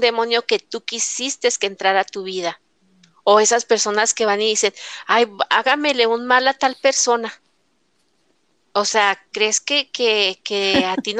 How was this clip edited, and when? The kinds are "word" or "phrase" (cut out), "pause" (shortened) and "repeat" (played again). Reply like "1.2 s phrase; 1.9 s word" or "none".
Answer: none